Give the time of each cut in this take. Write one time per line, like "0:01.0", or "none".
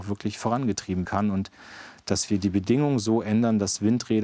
0:01.0
0:02.3

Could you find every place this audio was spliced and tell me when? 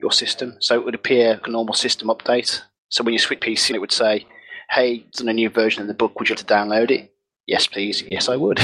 0:01.4
0:03.4
0:03.7
0:05.1
0:06.3

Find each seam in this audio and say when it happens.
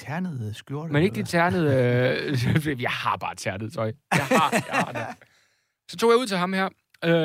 none

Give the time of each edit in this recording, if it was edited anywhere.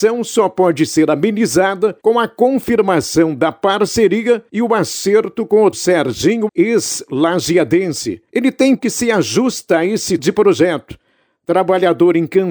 0:02.0
0:04.5
0:05.7
0:06.5
0:08.3
0:08.8
0:10.2

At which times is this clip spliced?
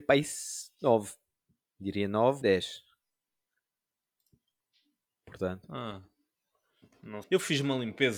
0:02.4
0:07.2

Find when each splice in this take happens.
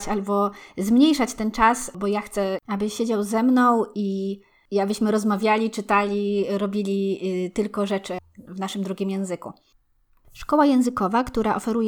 none

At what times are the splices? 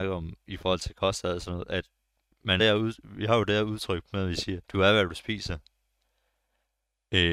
0:02.6
0:04.6

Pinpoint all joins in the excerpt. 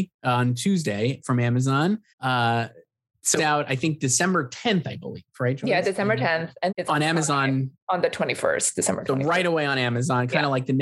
0:02.1
0:03.4
0:06.7

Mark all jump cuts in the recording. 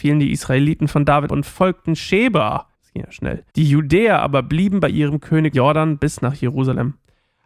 0:01.3
0:02.7
0:03.5
0:05.5

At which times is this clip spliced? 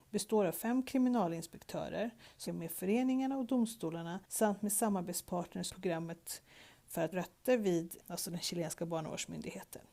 0:02.5
0:04.2
0:05.7
0:07.1
0:08.0

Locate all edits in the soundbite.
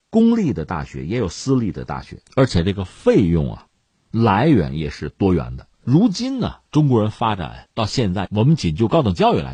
0:02.3
0:05.7
0:06.7

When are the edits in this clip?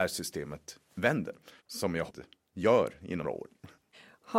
0:01.6
0:02.1
0:03.2

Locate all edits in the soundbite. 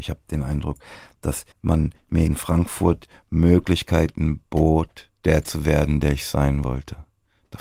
0:01.5
0:02.3
0:05.2

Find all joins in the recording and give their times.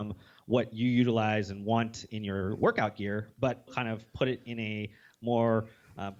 0:03.7

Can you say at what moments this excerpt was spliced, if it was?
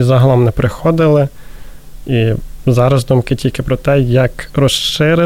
none

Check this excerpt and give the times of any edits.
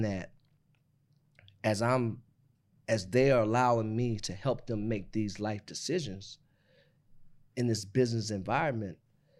none

